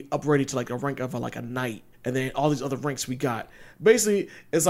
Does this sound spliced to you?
yes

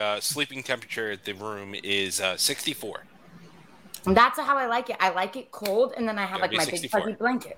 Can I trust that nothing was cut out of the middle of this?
yes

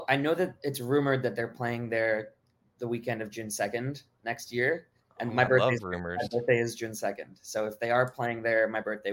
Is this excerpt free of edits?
yes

